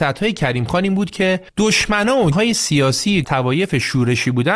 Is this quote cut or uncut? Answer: cut